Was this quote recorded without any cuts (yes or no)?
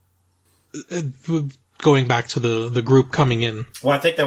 yes